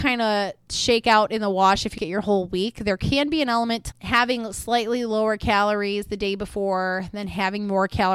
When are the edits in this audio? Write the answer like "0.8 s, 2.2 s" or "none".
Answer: 2.0 s, 3.9 s